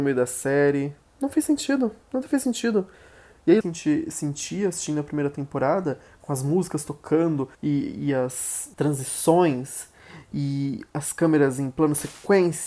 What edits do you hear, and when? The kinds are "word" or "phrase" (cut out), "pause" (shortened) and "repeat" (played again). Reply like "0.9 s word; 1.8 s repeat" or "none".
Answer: 2.0 s pause; 3.6 s phrase; 7.5 s pause; 8.7 s pause